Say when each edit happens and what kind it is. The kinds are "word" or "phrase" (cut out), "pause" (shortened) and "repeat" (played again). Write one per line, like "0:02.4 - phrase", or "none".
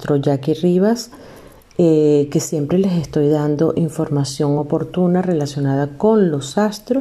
none